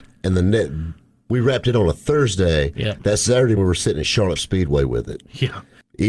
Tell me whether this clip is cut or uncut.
cut